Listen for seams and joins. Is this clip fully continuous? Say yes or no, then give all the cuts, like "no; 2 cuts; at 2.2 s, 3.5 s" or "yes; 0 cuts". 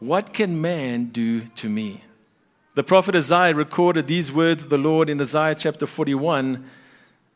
no; 1 cut; at 2.4 s